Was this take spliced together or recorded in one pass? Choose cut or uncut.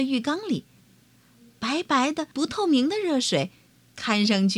cut